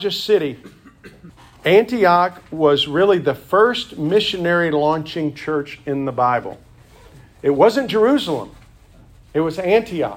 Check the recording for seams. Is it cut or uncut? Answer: uncut